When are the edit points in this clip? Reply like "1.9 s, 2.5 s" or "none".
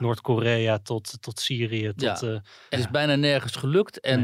2.7 s